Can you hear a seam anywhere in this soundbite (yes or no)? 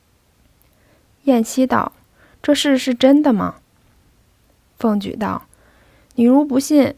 no